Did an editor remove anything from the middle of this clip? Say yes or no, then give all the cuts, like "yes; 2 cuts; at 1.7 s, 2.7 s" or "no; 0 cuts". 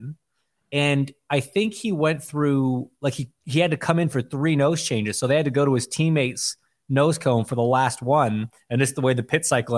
no; 0 cuts